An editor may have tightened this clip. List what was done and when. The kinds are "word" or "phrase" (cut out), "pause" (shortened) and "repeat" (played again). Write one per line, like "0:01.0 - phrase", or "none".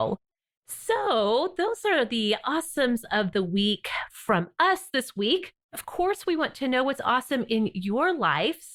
none